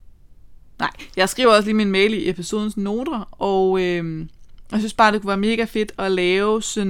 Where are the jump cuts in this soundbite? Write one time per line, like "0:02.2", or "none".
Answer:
none